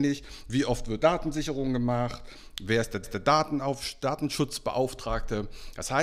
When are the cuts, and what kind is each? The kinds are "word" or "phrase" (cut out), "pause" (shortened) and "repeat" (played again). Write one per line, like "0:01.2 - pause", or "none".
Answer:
0:01.0 - word
0:03.0 - repeat